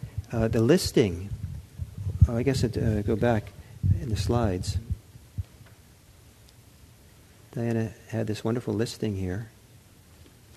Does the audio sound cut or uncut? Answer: uncut